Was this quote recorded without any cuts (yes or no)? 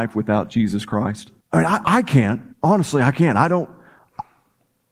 no